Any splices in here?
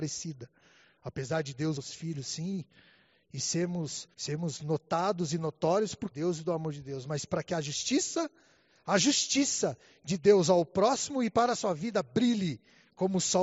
yes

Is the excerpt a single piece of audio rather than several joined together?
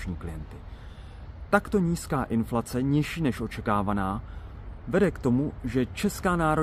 yes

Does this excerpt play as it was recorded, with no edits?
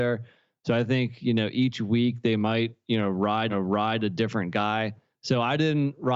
no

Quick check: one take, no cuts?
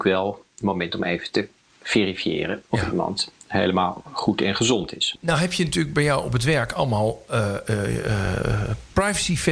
yes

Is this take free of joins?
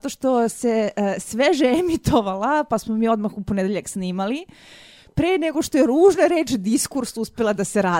yes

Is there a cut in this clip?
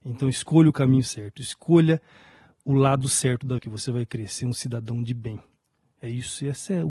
yes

